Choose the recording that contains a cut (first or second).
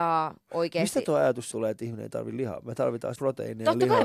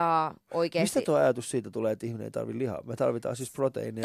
first